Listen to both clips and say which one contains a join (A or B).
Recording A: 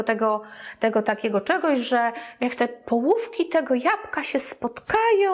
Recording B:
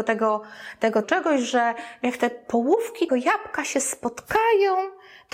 B